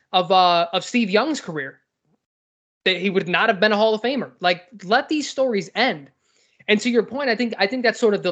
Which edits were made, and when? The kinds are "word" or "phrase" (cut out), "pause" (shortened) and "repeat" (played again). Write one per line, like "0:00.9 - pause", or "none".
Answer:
none